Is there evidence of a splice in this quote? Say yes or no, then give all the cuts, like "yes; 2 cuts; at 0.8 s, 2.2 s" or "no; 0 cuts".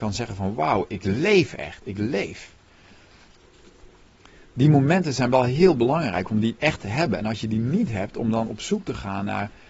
no; 0 cuts